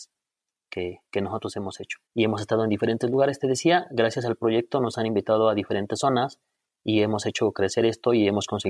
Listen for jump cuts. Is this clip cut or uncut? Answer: cut